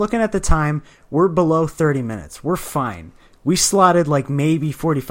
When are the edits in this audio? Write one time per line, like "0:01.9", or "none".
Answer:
none